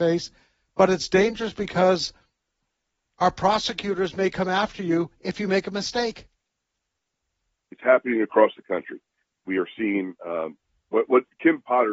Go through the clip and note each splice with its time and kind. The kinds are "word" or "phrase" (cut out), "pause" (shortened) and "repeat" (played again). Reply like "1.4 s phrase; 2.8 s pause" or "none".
none